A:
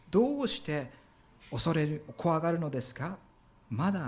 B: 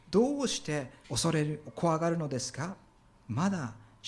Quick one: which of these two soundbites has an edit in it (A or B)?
B